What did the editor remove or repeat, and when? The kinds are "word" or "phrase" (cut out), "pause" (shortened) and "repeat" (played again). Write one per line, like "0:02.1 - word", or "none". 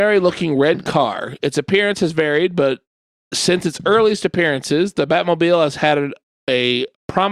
none